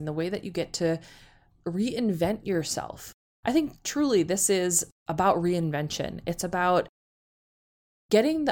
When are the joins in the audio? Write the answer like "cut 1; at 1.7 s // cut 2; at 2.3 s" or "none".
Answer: none